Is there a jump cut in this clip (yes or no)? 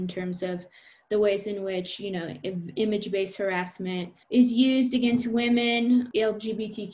yes